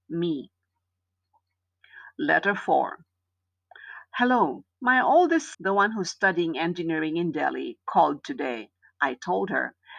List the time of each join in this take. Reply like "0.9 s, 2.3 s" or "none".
4.7 s, 5.5 s